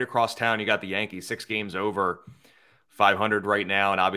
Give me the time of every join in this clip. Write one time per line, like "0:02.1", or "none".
none